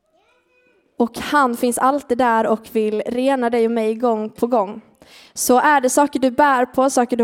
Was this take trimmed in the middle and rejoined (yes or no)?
no